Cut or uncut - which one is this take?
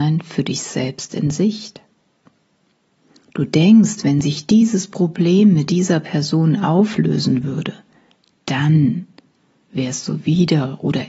uncut